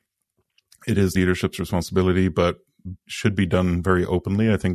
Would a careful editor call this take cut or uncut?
cut